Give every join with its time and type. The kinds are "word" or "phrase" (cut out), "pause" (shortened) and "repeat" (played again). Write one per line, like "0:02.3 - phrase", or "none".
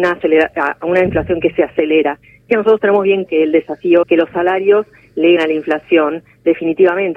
0:02.5 - word
0:03.3 - word
0:04.0 - word
0:05.4 - word